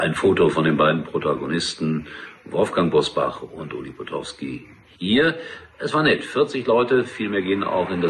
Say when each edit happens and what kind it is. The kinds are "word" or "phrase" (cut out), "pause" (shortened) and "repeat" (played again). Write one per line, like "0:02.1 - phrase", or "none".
none

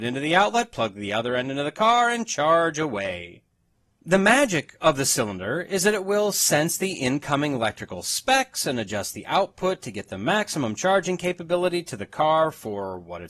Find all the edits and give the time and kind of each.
none

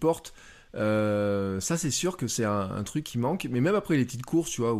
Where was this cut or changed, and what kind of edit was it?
none

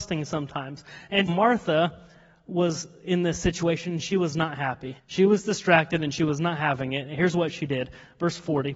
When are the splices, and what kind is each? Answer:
0:01.3 - word
0:05.0 - pause

